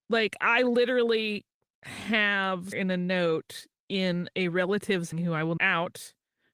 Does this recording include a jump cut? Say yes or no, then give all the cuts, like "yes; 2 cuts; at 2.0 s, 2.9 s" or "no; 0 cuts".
yes; 3 cuts; at 2.7 s, 5.1 s, 5.6 s